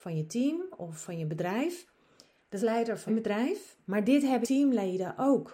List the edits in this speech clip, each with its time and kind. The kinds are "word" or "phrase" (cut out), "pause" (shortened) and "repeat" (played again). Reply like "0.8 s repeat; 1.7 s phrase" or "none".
1.0 s word; 2.6 s phrase; 3.1 s word; 3.8 s pause; 4.4 s word